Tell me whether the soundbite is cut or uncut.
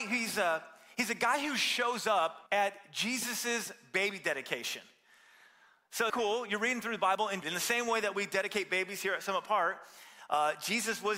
cut